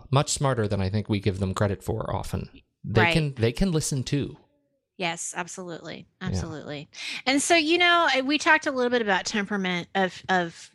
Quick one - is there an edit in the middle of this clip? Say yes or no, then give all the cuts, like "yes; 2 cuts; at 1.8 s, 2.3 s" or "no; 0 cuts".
no; 0 cuts